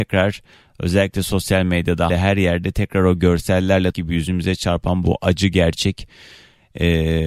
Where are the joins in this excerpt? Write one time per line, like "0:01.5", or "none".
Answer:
0:02.1
0:03.9